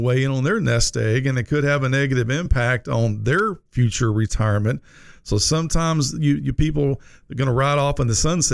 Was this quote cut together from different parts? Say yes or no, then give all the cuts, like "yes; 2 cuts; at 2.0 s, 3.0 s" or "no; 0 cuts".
no; 0 cuts